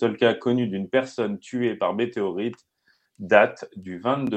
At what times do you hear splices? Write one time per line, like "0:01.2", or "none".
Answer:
none